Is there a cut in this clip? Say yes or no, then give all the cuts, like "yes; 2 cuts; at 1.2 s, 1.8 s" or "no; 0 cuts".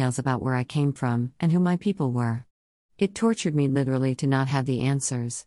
no; 0 cuts